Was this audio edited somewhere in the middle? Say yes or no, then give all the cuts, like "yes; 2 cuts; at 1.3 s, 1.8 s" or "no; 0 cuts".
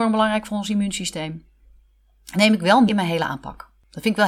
yes; 2 cuts; at 2.3 s, 2.9 s